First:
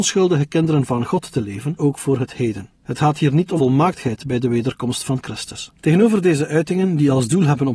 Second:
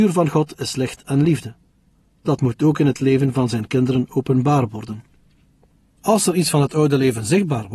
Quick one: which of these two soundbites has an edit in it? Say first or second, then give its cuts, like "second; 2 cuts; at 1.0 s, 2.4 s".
first; 4 cuts; at 1.8 s, 2.7 s, 3.6 s, 5.8 s